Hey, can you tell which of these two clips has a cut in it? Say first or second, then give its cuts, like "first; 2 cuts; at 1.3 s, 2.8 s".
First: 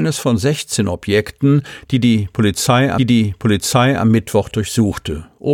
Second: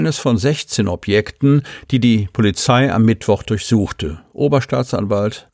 first; 1 cut; at 3.0 s